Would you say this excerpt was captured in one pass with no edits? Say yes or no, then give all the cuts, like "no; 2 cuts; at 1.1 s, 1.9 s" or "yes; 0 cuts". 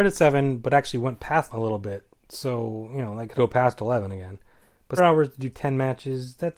no; 3 cuts; at 1.5 s, 3.3 s, 5.0 s